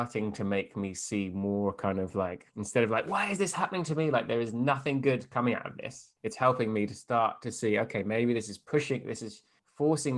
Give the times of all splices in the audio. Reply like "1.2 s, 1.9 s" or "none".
2.5 s, 6.2 s